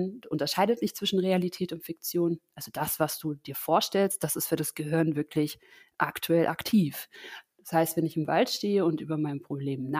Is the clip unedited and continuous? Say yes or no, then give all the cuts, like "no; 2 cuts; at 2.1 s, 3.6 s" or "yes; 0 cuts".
yes; 0 cuts